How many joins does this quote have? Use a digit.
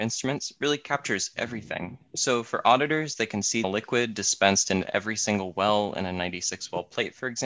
1